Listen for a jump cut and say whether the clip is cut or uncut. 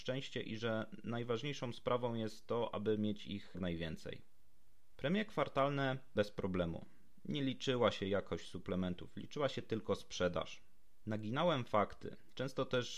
cut